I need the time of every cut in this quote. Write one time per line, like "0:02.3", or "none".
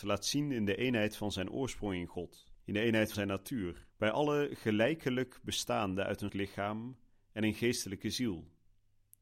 0:02.6
0:03.1
0:03.9
0:06.3